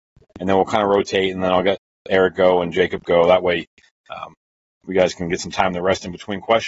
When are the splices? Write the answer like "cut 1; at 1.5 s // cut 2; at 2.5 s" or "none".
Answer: none